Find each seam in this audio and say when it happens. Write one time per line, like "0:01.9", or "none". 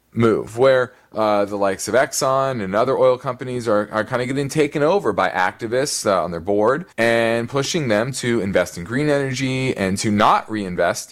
0:06.9

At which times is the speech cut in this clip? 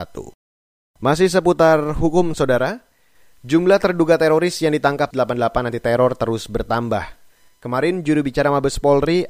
0:05.1

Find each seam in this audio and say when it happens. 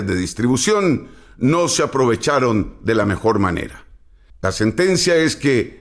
none

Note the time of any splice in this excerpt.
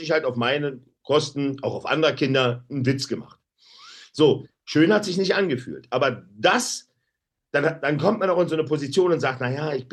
none

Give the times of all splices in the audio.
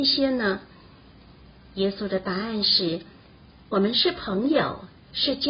none

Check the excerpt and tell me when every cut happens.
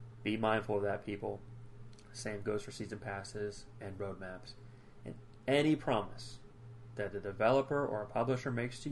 none

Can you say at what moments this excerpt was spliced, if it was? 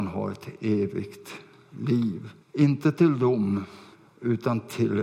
0:02.4
0:03.9

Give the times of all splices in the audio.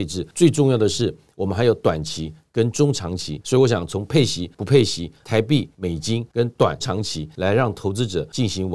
0:06.8

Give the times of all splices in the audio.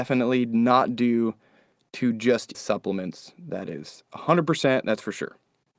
0:02.5

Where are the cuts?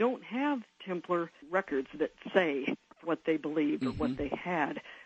0:03.0

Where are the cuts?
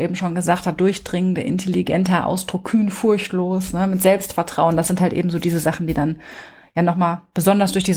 none

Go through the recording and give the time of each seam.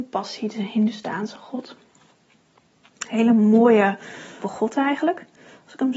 0:04.4

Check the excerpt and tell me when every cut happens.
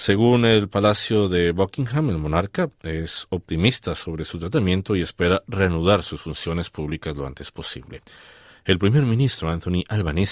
none

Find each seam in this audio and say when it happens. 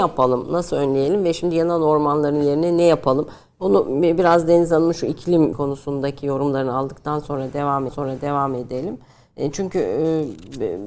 0:05.5
0:07.9

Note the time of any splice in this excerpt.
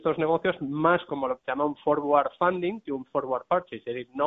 none

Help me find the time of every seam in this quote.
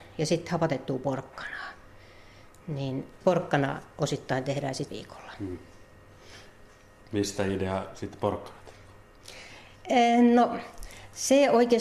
0:03.2
0:04.9

